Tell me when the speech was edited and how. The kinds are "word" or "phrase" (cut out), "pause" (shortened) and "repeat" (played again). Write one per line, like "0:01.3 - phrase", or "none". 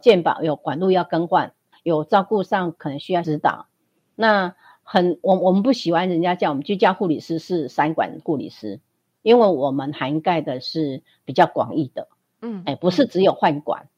none